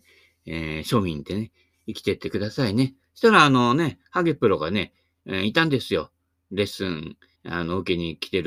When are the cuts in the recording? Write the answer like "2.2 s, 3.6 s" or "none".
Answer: 7.3 s